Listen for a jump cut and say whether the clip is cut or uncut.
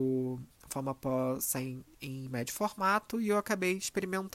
uncut